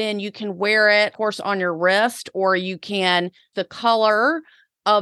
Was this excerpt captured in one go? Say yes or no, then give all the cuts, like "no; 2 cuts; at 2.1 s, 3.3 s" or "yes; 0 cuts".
no; 2 cuts; at 1.1 s, 3.5 s